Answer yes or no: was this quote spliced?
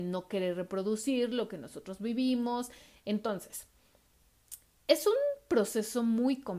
no